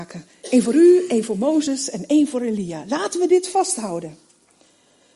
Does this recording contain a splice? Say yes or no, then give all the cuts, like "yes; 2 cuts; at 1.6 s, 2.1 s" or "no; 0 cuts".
no; 0 cuts